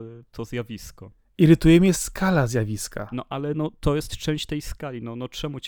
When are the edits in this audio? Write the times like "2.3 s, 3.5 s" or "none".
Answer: none